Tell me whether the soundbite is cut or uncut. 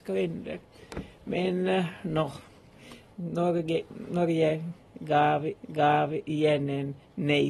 cut